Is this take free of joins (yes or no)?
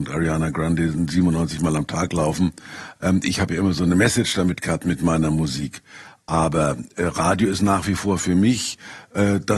yes